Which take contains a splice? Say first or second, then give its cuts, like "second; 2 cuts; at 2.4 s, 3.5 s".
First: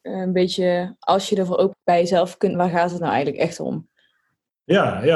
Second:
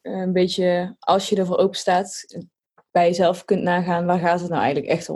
first; 2 cuts; at 1.7 s, 2.5 s